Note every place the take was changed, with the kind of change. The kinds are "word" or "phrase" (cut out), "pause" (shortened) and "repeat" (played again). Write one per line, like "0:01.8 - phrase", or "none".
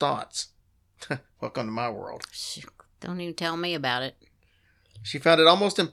none

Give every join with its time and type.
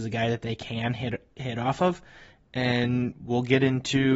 none

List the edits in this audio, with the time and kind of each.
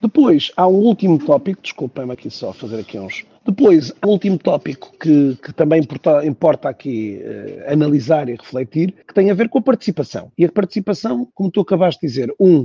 0:02.1 - phrase
0:03.4 - pause
0:04.0 - word
0:09.0 - pause
0:11.3 - pause

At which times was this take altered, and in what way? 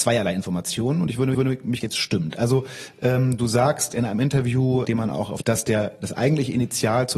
0:01.3 - repeat
0:01.8 - phrase
0:03.9 - word
0:04.8 - word
0:05.4 - phrase

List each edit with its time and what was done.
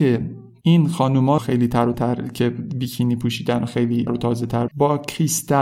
0:01.4 - word
0:01.9 - word
0:04.1 - word
0:04.7 - word

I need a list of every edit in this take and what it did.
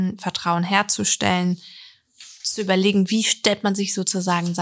none

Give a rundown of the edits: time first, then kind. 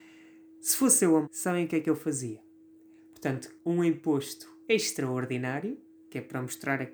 0:01.2 - word
0:03.6 - word

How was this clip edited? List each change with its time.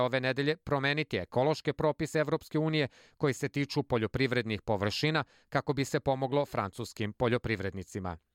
none

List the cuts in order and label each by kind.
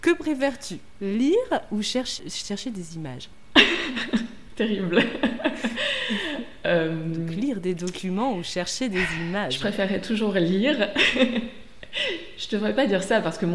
none

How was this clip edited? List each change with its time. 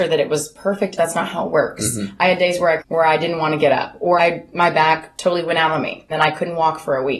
0:01.0 - phrase
0:02.8 - phrase
0:04.2 - word
0:06.1 - word

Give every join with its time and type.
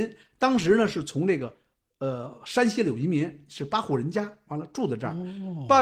none

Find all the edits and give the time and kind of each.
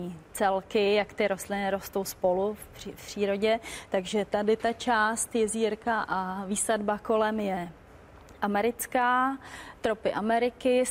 none

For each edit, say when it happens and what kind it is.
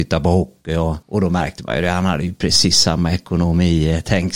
0:01.0 - pause

